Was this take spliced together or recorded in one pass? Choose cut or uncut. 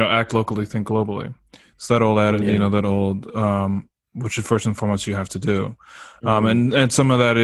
uncut